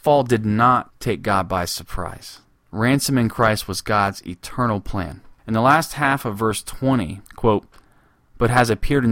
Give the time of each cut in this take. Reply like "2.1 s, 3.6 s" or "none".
7.3 s